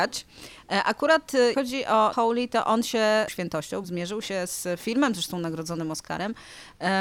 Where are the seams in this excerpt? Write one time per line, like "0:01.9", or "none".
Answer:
0:01.5
0:02.1
0:03.3
0:03.8